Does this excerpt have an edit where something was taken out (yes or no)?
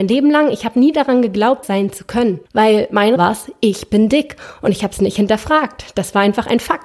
yes